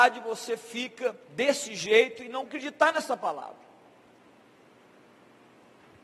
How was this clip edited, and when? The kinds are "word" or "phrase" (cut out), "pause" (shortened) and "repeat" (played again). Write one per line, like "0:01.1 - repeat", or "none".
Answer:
0:01.2 - pause
0:02.5 - word